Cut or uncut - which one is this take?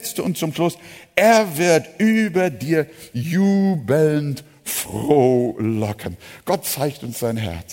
uncut